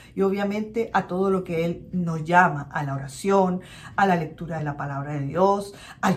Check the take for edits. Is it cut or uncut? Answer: uncut